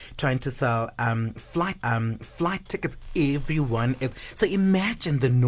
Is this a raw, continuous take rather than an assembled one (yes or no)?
no